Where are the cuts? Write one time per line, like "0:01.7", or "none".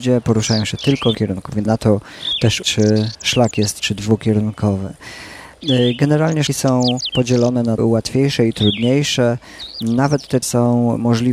0:01.1
0:01.7
0:02.6
0:03.8
0:06.5
0:07.8
0:10.4